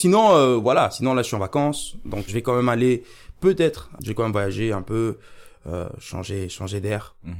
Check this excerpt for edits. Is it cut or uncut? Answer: cut